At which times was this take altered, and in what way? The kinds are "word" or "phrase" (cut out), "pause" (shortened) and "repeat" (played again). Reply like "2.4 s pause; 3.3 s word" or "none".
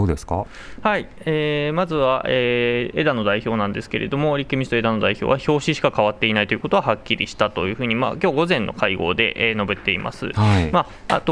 none